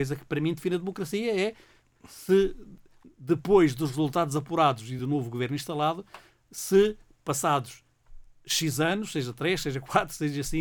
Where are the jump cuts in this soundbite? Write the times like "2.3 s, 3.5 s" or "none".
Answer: none